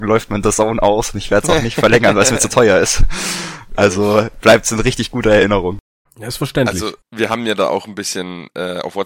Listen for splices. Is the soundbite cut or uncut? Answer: cut